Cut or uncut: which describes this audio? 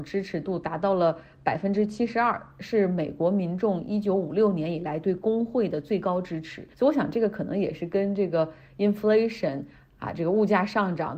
cut